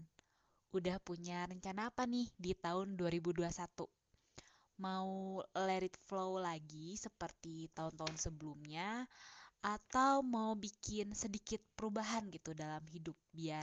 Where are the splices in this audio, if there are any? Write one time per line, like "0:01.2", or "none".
none